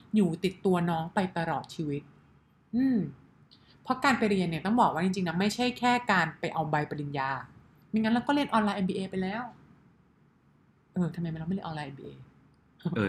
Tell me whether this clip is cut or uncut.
uncut